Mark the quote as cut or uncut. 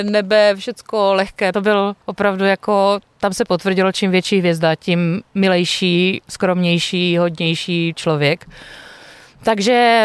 cut